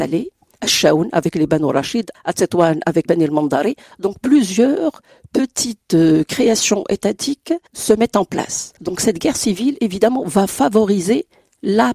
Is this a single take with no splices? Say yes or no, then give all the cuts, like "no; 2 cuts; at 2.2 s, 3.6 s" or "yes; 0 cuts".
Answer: no; 3 cuts; at 3.1 s, 7.7 s, 8.8 s